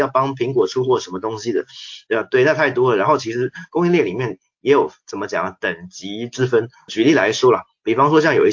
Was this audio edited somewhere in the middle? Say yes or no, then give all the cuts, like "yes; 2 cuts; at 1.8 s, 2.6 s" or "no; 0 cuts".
yes; 1 cut; at 6.9 s